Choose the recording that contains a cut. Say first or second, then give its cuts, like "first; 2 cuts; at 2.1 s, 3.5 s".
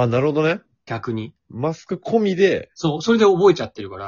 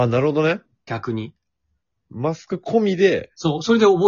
first; 1 cut; at 1.4 s